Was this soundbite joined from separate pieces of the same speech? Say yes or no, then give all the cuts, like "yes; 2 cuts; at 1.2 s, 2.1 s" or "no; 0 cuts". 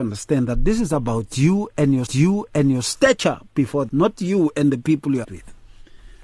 yes; 3 cuts; at 2.1 s, 3.9 s, 5.2 s